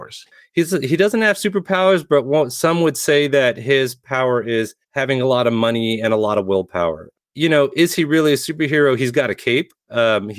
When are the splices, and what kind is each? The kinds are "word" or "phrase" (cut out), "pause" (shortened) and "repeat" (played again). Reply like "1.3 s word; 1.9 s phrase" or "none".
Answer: 4.8 s pause

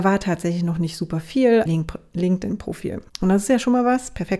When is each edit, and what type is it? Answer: 1.7 s phrase; 3.1 s pause

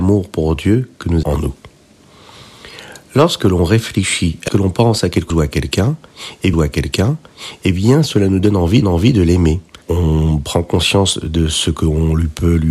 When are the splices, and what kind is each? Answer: 1.2 s word; 4.5 s phrase; 5.3 s word; 6.5 s repeat; 8.8 s repeat; 9.8 s pause

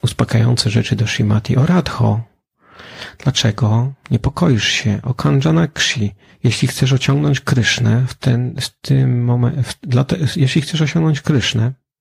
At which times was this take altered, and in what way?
6.3 s pause

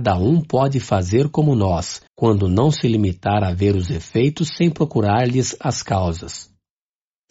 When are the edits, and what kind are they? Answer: 2.1 s pause

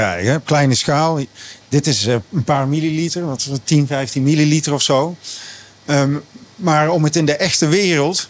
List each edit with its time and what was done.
none

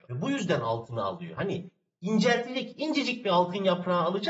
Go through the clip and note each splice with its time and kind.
none

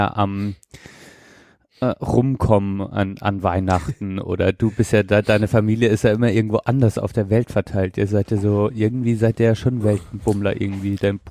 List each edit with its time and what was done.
none

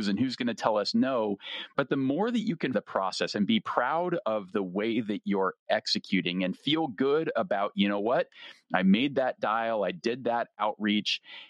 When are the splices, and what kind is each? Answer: 2.7 s phrase

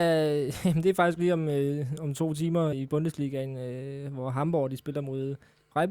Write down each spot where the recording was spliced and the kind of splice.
1.2 s word; 2.7 s word

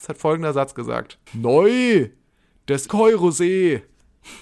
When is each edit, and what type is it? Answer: 1.3 s pause; 2.9 s word

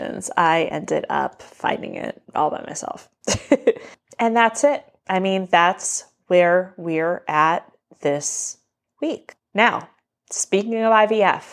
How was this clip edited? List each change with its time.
2.2 s pause

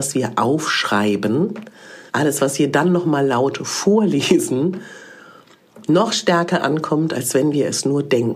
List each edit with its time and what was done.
2.1 s pause

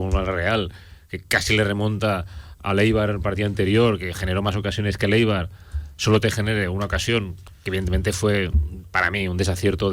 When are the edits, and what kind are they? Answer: none

